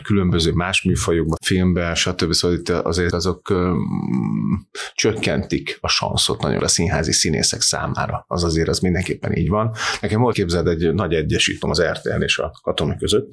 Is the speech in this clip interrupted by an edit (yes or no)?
yes